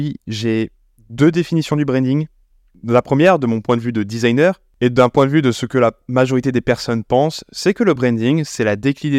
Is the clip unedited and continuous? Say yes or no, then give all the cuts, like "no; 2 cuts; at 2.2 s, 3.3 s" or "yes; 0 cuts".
yes; 0 cuts